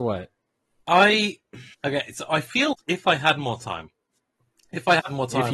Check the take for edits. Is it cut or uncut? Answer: cut